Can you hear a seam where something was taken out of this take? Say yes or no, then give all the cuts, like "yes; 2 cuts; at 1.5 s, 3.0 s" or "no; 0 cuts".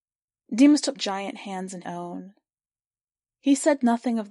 yes; 2 cuts; at 0.9 s, 1.8 s